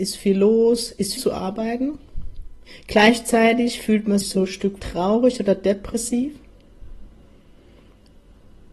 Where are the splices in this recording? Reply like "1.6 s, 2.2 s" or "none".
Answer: 1.2 s, 2.7 s, 4.2 s, 4.8 s